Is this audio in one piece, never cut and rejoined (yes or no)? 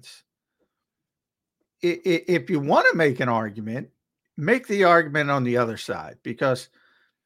yes